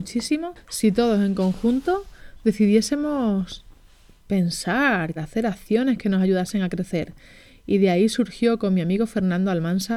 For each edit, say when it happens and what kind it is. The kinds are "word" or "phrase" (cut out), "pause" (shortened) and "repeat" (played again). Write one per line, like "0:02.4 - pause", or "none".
0:05.2 - word